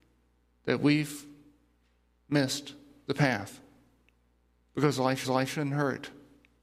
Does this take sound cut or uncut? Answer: cut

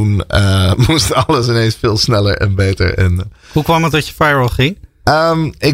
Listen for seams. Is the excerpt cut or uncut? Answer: uncut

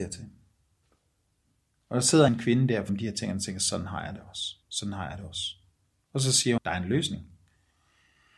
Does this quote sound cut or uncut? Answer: cut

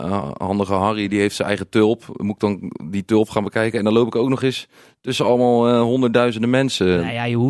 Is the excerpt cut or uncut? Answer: uncut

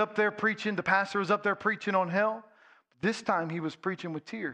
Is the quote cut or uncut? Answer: uncut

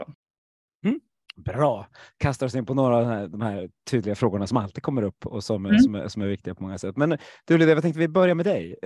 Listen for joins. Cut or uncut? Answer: uncut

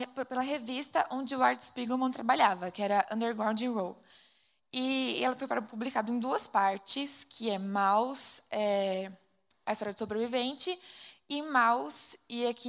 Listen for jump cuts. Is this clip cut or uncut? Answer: uncut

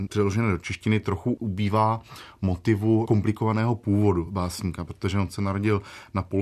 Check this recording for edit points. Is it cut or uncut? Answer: uncut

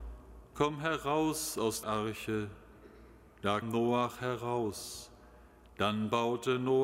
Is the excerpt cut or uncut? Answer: cut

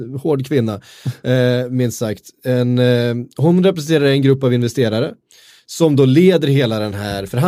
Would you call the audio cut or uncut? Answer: uncut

